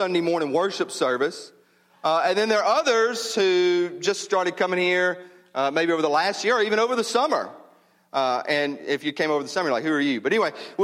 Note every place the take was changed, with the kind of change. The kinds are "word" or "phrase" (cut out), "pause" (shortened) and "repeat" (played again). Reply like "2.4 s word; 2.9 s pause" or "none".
none